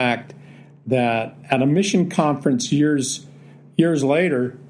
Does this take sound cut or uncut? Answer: uncut